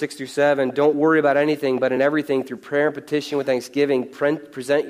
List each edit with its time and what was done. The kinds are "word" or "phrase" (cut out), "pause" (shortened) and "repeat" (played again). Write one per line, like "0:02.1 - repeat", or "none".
none